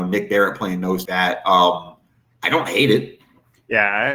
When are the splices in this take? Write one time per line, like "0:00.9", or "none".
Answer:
0:01.1
0:02.2